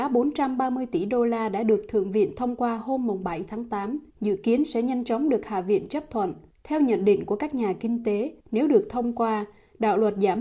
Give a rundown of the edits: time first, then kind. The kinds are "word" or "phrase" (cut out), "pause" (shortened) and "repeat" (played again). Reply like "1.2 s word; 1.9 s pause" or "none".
4.1 s pause; 6.5 s pause; 8.4 s pause

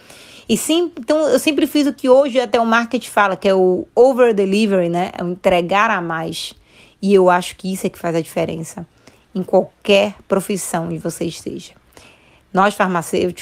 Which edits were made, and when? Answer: none

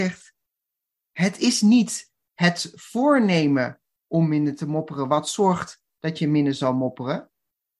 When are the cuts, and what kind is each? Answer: none

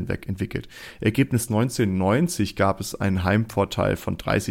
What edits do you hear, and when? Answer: 1.5 s phrase

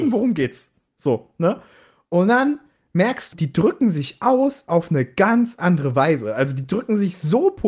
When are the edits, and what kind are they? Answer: 3.3 s word

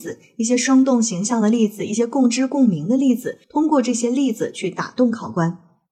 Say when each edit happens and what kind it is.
3.4 s pause

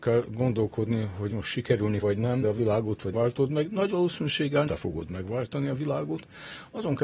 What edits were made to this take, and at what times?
1.3 s word; 2.0 s word; 2.4 s word; 3.1 s word; 4.7 s word

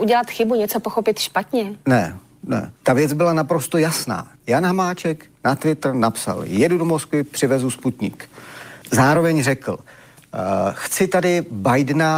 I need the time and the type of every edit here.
2.8 s pause; 4.4 s pause; 8.8 s pause

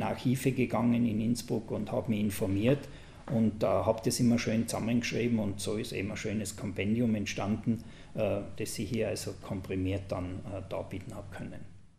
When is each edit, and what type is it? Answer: none

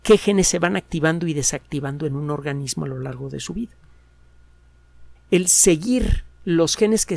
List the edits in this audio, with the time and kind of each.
5.2 s pause

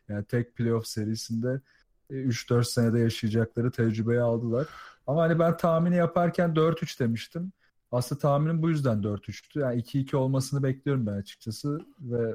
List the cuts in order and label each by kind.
none

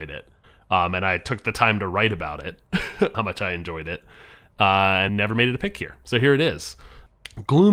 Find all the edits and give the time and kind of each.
3.1 s word; 5.1 s word

